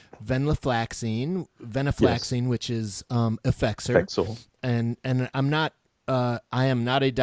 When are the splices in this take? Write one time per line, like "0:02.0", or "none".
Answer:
none